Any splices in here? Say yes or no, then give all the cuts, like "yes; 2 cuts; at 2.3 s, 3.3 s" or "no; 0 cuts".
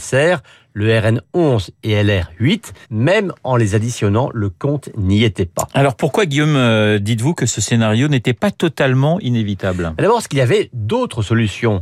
yes; 1 cut; at 2.8 s